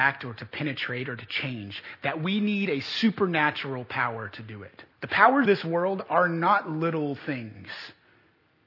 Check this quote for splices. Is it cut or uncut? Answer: cut